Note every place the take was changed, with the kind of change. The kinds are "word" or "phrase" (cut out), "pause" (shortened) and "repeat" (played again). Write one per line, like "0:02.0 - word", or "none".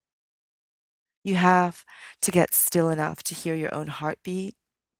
none